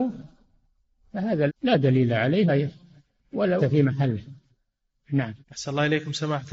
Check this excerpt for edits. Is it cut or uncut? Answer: cut